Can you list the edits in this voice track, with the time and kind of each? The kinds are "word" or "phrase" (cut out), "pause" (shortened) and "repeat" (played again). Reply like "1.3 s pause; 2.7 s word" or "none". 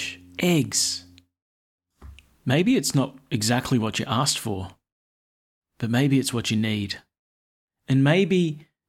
none